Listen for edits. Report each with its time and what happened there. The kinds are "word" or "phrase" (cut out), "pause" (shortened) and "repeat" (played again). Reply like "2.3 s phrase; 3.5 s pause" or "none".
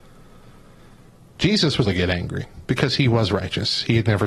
1.8 s word

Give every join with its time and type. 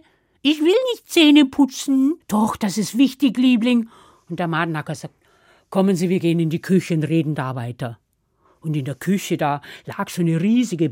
2.2 s pause

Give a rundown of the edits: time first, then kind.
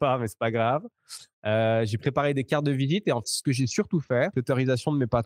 3.2 s word; 4.3 s word

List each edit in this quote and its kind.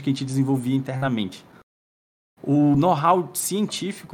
none

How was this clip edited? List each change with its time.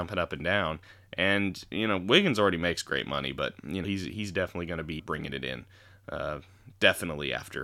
3.8 s phrase; 5.0 s word

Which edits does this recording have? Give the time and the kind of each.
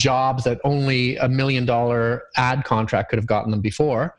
none

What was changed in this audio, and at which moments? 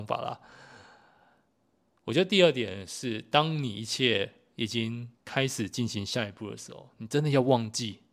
5.1 s pause

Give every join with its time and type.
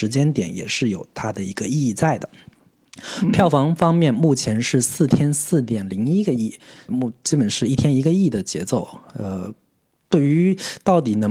6.9 s word

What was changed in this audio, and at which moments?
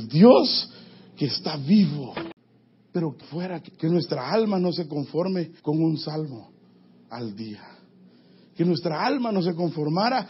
3.2 s word; 5.6 s pause

